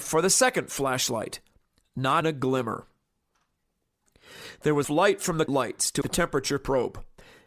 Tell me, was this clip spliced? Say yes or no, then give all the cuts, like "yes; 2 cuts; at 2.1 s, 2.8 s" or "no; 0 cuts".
yes; 4 cuts; at 2.2 s, 4.8 s, 5.5 s, 6.0 s